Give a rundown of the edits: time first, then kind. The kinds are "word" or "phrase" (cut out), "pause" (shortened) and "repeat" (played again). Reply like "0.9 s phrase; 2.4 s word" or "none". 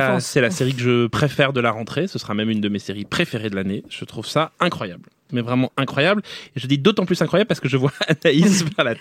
4.5 s pause